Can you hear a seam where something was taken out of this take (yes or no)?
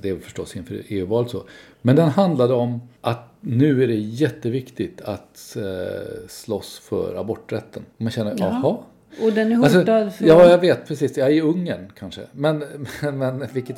yes